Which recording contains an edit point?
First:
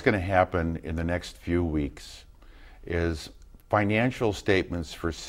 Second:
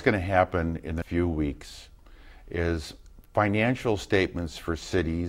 second; 1 cut; at 1.0 s

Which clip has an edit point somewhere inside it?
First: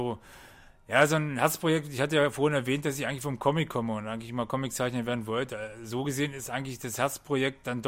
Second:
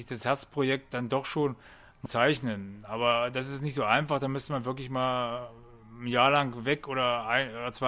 second; 1 cut; at 2.1 s

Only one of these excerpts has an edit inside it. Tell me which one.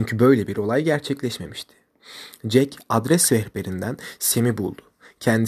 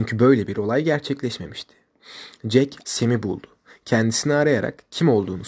second; 1 cut; at 2.8 s

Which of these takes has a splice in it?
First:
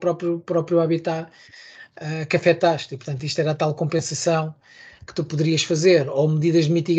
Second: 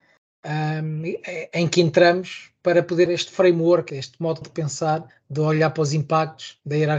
second; 4 cuts; at 3.1 s, 3.9 s, 4.4 s, 5.1 s

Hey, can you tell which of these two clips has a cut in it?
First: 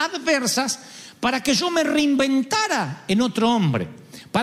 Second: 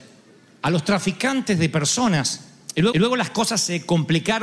second; 1 cut; at 2.9 s

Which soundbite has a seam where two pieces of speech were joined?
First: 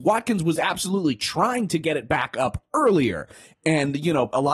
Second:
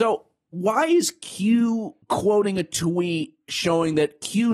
second; 1 cut; at 2.0 s

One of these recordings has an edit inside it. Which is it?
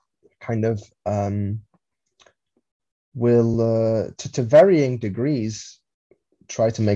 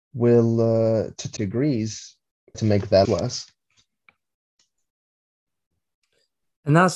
second; 3 cuts; at 1.4 s, 2.5 s, 3.0 s

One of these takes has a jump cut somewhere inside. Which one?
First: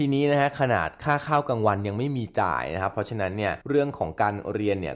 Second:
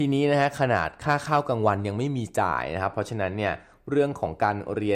first; 1 cut; at 3.6 s

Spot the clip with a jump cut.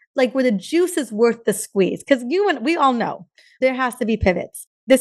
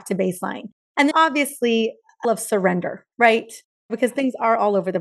second; 3 cuts; at 1.1 s, 2.2 s, 3.1 s

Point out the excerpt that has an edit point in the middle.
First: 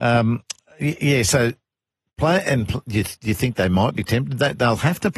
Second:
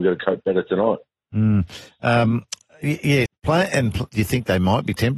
second; 2 cuts; at 3.3 s, 4.1 s

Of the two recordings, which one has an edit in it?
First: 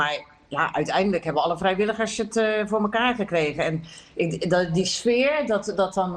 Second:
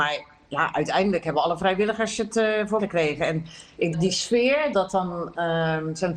second; 3 cuts; at 2.8 s, 3.9 s, 4.7 s

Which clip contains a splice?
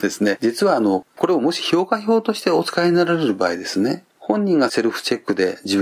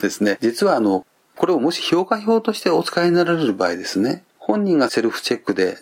first; 1 cut; at 1.1 s

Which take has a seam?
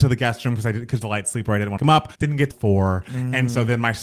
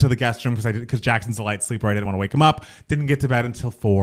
first; 4 cuts; at 1.0 s, 1.8 s, 2.1 s, 2.5 s

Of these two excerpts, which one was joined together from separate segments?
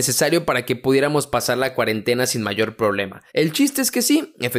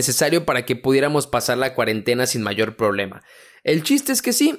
first; 1 cut; at 3.3 s

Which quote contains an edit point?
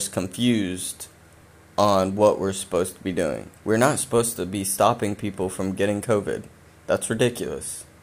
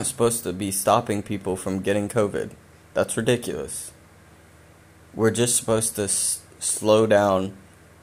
first; 1 cut; at 3.6 s

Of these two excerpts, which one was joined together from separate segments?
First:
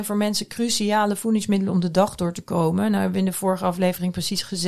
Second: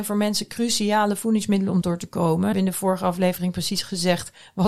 second; 2 cuts; at 1.8 s, 2.5 s

